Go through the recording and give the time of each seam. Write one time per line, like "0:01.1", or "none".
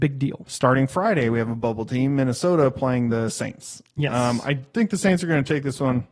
none